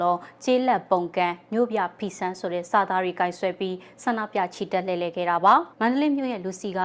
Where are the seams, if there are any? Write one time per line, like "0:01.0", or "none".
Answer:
0:05.7